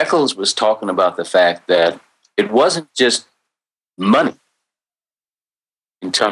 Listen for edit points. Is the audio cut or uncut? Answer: uncut